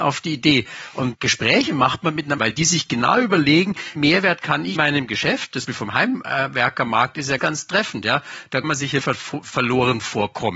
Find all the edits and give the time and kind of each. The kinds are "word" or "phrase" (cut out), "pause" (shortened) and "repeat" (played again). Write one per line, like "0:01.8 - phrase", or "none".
0:01.1 - word
0:02.4 - word
0:04.0 - word
0:04.7 - word
0:05.7 - word
0:07.4 - word
0:08.6 - word
0:09.0 - word

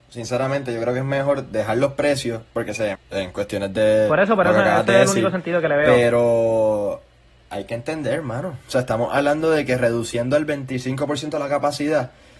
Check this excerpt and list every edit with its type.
0:02.9 - word

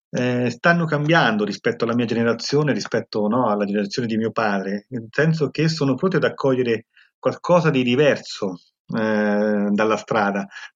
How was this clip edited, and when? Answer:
none

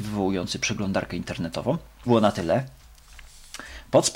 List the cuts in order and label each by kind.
0:02.1 - phrase

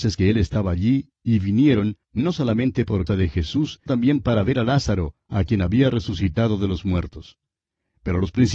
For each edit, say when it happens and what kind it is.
0:02.0 - pause
0:03.1 - word
0:03.9 - word

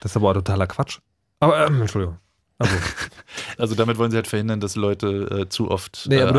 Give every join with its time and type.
0:03.6 - phrase

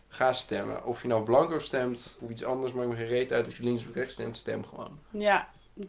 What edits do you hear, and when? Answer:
0:02.2 - word

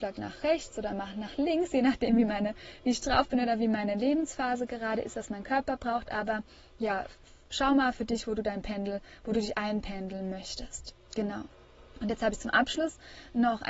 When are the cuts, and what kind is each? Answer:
none

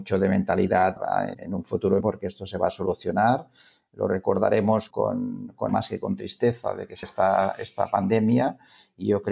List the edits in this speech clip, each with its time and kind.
0:01.0 - word
0:01.3 - word
0:02.0 - word
0:04.9 - word
0:05.7 - word
0:07.0 - word

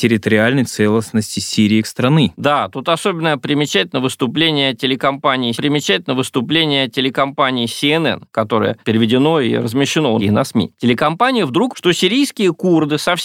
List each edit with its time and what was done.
0:01.8 - word
0:05.5 - repeat
0:10.2 - phrase
0:11.7 - word

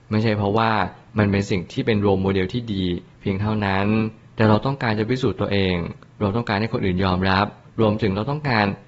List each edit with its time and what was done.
none

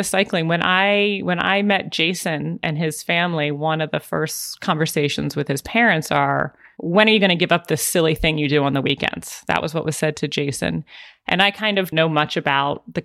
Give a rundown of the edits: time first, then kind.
0:11.9 - word

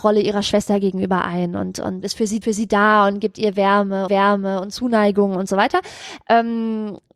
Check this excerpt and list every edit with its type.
0:02.0 - phrase
0:02.4 - repeat
0:04.1 - repeat

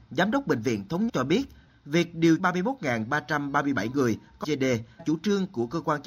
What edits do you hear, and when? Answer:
0:01.1 - word
0:02.4 - word
0:04.4 - word
0:05.0 - word

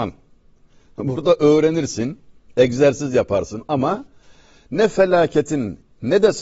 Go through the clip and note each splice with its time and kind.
none

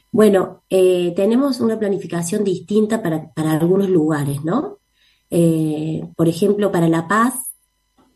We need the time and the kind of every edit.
0:06.1 - pause

